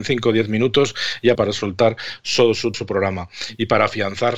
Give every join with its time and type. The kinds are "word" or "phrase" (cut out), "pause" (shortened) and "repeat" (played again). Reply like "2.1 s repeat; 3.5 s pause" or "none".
1.3 s word; 2.7 s word